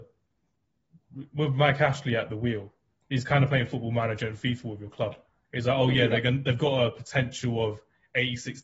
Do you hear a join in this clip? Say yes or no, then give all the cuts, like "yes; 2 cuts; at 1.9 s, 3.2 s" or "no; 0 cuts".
no; 0 cuts